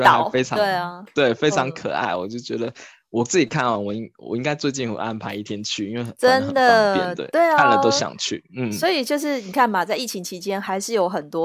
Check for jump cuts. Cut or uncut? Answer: uncut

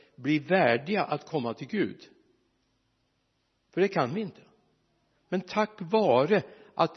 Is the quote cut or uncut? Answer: uncut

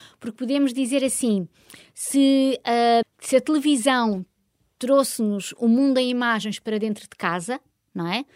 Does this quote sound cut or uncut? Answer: cut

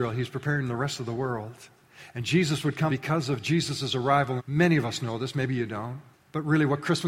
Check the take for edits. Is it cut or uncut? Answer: cut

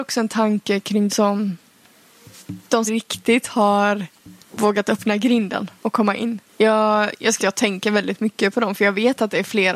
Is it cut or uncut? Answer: cut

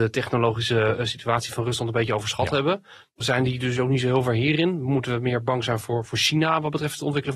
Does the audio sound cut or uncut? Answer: uncut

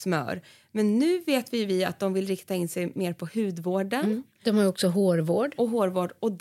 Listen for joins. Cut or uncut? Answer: uncut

